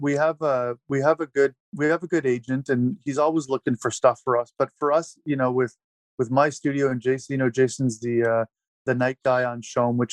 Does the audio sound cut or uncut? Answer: uncut